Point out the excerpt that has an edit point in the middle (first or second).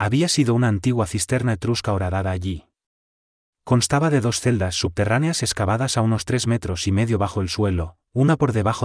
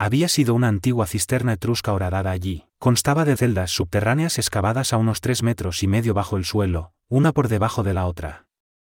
second